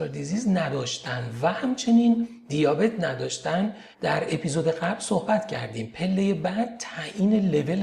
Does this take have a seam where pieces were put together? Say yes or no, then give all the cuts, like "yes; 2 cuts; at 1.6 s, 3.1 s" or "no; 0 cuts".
yes; 1 cut; at 3.9 s